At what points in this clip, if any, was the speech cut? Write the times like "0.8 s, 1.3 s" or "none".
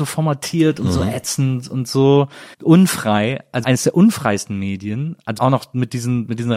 2.5 s, 3.6 s, 5.4 s